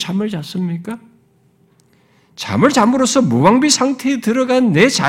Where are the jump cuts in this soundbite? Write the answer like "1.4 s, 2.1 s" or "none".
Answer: none